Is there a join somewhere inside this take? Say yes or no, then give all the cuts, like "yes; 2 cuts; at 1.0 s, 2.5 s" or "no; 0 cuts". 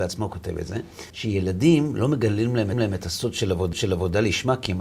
yes; 3 cuts; at 1.1 s, 2.7 s, 3.7 s